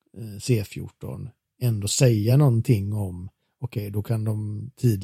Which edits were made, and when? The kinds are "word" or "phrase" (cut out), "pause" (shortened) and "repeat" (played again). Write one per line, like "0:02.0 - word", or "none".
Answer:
none